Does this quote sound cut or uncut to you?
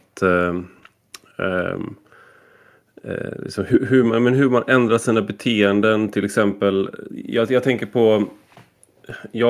uncut